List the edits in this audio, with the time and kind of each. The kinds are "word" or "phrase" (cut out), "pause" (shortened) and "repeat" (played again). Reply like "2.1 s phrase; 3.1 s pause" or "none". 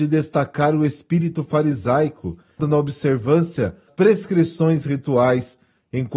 2.6 s phrase; 3.9 s word